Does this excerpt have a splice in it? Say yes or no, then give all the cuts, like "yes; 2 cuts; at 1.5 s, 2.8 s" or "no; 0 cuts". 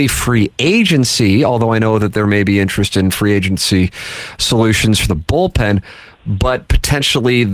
no; 0 cuts